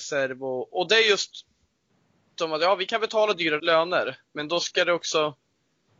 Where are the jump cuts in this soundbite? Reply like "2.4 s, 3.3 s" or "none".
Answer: 2.4 s, 3.6 s, 4.3 s